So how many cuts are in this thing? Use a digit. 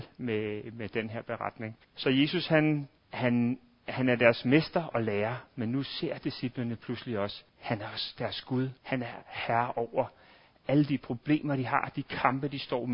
4